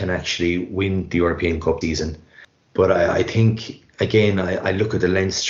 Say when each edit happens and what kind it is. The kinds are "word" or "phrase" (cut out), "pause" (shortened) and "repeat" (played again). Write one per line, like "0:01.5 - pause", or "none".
0:01.8 - word